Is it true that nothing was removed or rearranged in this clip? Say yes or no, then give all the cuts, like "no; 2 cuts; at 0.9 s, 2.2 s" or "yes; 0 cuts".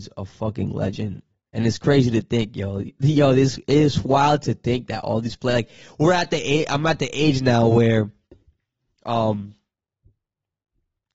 yes; 0 cuts